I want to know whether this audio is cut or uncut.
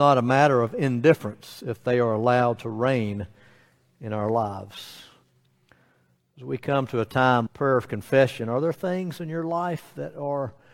cut